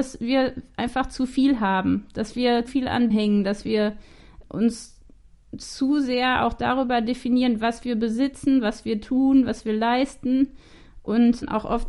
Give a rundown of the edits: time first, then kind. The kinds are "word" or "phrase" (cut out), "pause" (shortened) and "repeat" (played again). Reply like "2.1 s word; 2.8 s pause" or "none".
2.7 s word; 3.1 s word